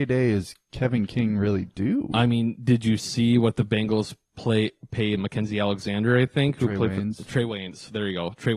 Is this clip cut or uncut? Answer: cut